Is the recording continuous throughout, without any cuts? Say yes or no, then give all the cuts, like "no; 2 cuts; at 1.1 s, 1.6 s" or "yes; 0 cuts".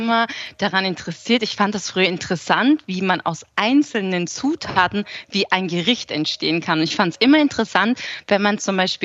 yes; 0 cuts